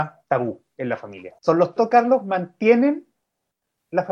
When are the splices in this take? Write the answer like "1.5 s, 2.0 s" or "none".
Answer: 1.4 s, 1.8 s